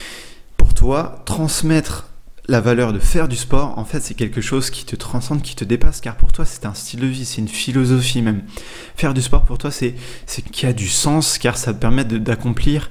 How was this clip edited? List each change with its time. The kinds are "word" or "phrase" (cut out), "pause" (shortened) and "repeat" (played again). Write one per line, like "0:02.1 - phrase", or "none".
0:10.4 - phrase